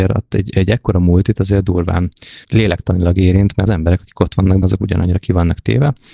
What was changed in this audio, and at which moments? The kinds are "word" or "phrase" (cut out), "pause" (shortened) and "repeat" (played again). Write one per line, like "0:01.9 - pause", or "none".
0:02.4 - pause
0:03.7 - phrase
0:04.6 - word